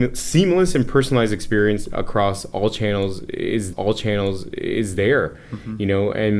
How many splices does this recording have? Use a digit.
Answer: 1